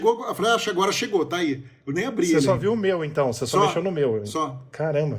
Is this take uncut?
yes; 0 cuts

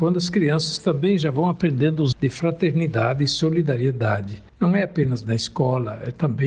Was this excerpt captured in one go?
no; 2 cuts; at 2.1 s, 4.5 s

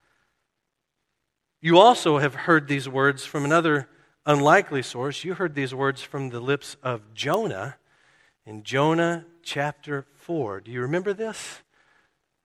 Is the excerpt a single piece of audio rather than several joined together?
yes; 0 cuts

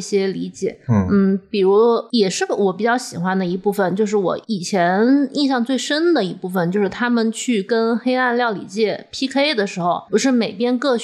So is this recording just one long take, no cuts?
no; 2 cuts; at 4.4 s, 10.1 s

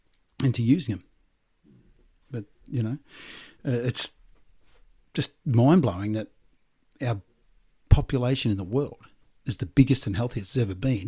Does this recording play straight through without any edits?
yes; 0 cuts

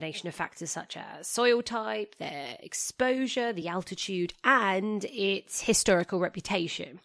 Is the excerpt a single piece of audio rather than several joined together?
yes; 0 cuts

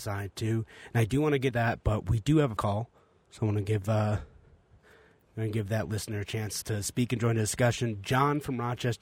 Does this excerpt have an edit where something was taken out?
yes; 3 cuts; at 1.5 s, 2.6 s, 6.6 s

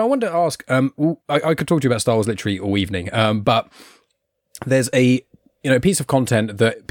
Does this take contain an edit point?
yes; 1 cut; at 1.2 s

